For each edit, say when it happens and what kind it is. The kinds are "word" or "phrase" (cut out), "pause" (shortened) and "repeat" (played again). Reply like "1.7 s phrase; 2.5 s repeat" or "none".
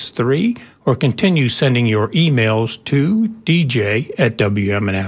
none